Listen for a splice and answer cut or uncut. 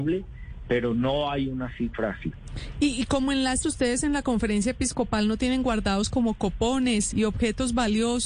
cut